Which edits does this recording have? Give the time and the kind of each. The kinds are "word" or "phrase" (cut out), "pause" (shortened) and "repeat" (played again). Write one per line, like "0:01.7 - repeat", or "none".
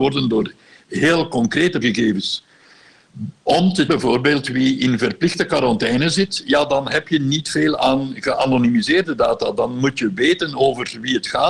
0:01.8 - word
0:03.9 - word

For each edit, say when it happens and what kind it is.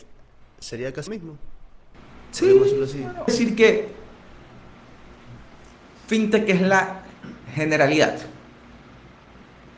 0:01.1 - word
0:03.3 - phrase

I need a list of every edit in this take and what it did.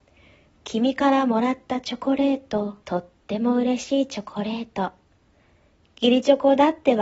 0:02.8 - pause

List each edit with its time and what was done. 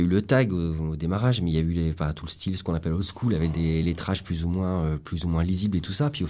none

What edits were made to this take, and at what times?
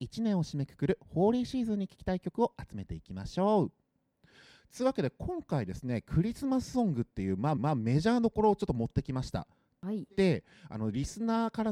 0:07.6 - repeat

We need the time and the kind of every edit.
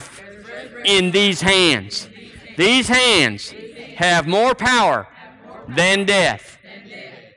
none

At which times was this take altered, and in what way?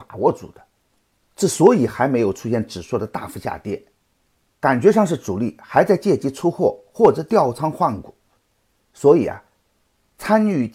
none

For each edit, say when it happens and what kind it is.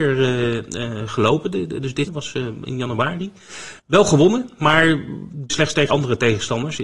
0:02.1 - word
0:03.8 - pause
0:05.5 - word
0:05.9 - word

